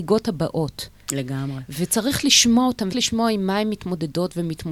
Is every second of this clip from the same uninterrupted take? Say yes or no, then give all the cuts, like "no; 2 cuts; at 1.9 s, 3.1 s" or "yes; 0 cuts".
no; 1 cut; at 2.9 s